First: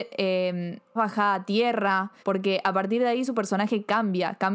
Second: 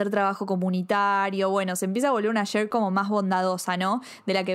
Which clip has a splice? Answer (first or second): first